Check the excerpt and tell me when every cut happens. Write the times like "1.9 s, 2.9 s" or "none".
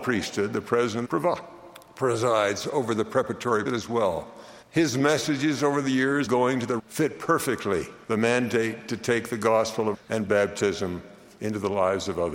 1.0 s, 3.7 s, 4.6 s, 6.3 s, 6.8 s, 8.0 s, 9.9 s